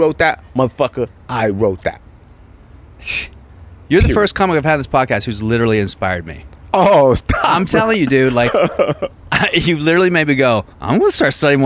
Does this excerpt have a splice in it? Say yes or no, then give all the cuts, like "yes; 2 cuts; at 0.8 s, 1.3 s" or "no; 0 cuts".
yes; 1 cut; at 10.7 s